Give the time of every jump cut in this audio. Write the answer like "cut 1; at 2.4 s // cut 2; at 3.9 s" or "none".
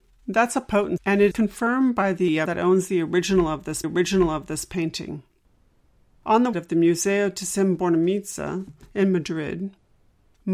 cut 1; at 1.0 s // cut 2; at 1.3 s // cut 3; at 2.5 s // cut 4; at 3.8 s // cut 5; at 6.5 s